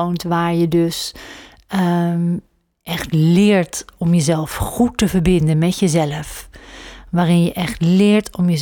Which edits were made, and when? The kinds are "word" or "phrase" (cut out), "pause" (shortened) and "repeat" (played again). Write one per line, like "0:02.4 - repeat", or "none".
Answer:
none